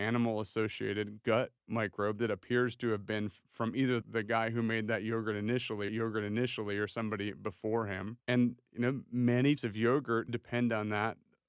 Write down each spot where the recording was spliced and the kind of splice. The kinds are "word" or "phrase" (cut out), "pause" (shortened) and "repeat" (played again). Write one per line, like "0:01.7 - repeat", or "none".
0:01.6 - pause
0:04.0 - word
0:05.9 - repeat
0:08.7 - pause
0:09.6 - word
0:10.3 - word